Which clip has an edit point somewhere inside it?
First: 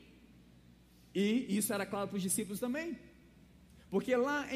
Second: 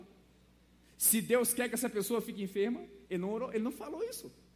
second; 1 cut; at 3.0 s

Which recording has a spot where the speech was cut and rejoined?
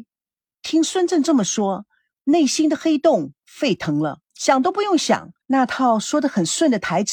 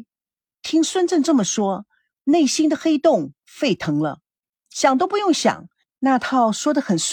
first; 2 cuts; at 4.2 s, 5.4 s

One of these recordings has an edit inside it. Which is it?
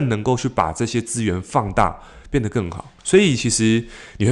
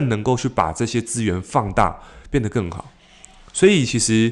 first; 1 cut; at 3.0 s

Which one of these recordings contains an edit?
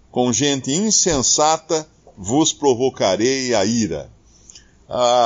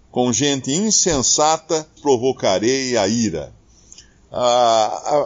second; 1 cut; at 2.0 s

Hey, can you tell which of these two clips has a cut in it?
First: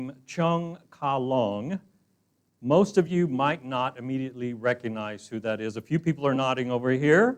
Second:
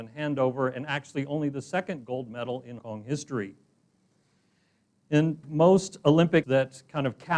second; 3 cuts; at 2.8 s, 5.4 s, 6.4 s

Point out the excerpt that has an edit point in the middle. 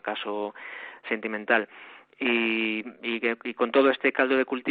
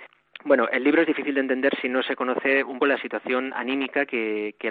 second; 1 cut; at 2.8 s

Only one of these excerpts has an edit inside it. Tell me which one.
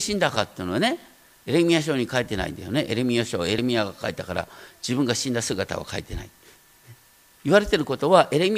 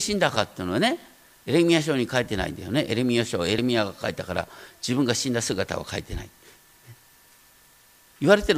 first; 1 cut; at 7.1 s

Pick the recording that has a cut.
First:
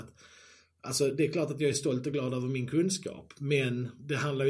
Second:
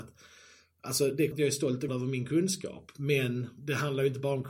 second; 2 cuts; at 1.3 s, 1.9 s

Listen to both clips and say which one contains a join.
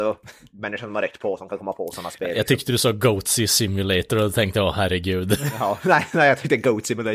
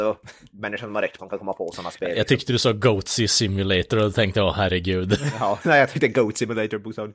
second; 2 cuts; at 1.2 s, 5.6 s

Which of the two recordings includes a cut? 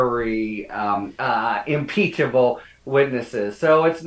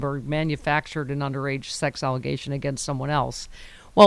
first; 1 cut; at 1.1 s

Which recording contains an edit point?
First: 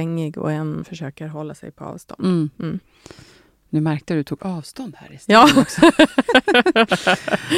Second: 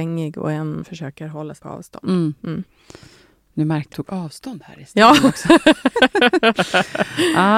second; 2 cuts; at 1.6 s, 3.9 s

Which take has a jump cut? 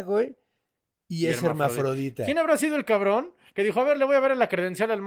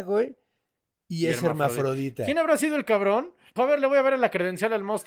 second; 1 cut; at 3.6 s

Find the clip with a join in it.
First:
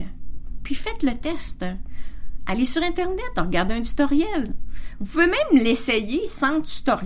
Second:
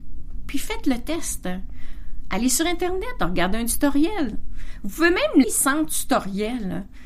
second; 1 cut; at 5.4 s

